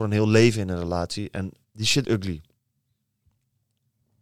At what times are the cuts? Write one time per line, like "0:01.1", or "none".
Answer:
0:01.6
0:02.0

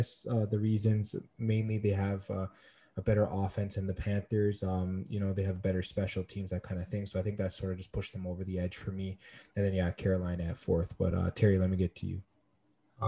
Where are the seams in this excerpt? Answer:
none

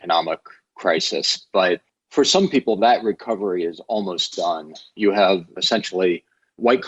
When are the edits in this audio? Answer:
none

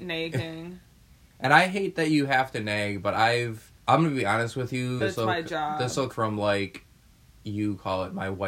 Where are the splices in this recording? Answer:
0:03.8
0:05.0
0:06.1

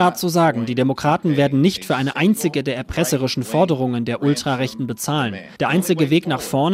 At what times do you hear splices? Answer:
0:05.6

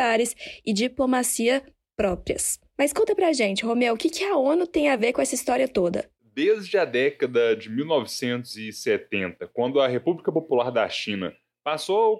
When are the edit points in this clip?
none

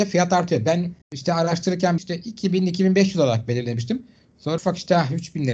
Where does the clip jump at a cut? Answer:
0:01.0
0:02.0
0:04.6

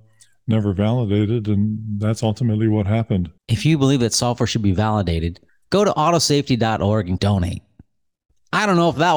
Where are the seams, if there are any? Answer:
0:03.4
0:05.5
0:07.2

